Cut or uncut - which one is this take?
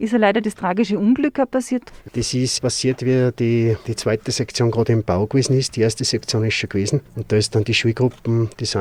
cut